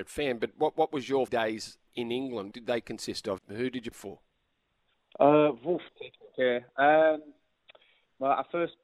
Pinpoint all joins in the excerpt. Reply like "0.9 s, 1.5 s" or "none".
1.3 s, 1.9 s, 2.5 s, 3.4 s, 3.9 s, 5.9 s, 6.3 s